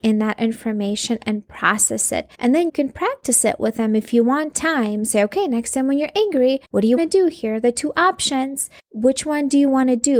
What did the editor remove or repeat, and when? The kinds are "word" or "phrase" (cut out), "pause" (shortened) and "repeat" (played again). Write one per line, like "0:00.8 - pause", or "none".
0:02.3 - pause
0:02.7 - word
0:04.5 - phrase
0:06.6 - pause
0:07.0 - word
0:08.8 - pause